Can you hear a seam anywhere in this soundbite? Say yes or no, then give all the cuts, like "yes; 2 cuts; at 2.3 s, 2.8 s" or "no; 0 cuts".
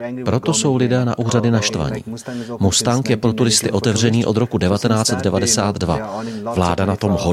no; 0 cuts